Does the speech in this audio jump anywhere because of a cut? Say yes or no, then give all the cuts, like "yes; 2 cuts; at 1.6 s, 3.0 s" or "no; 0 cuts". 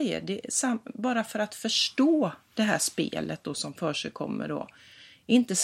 no; 0 cuts